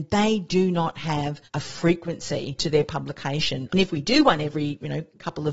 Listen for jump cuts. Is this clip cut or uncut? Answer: cut